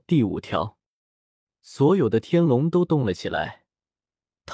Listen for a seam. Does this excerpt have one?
no; 0 cuts

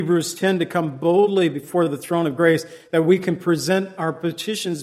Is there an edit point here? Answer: no; 0 cuts

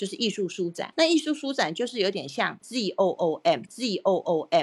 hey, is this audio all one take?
no; 1 cut; at 3.7 s

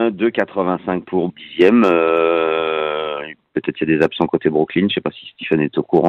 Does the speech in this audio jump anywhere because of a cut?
yes; 1 cut; at 1.3 s

